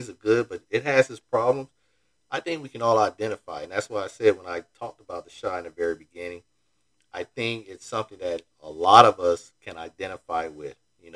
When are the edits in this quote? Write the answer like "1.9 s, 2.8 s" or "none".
none